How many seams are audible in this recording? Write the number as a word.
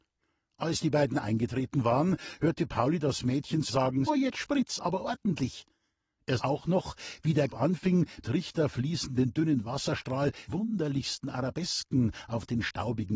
six